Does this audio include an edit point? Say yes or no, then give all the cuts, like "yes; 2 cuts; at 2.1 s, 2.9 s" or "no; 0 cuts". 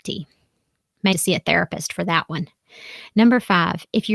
yes; 1 cut; at 1.1 s